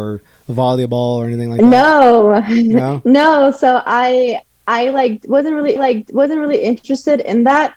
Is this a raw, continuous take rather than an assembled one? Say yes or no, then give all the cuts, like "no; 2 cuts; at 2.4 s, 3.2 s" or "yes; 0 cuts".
no; 1 cut; at 5.8 s